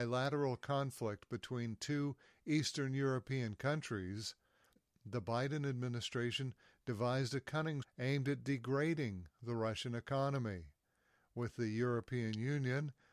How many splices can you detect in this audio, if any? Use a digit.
1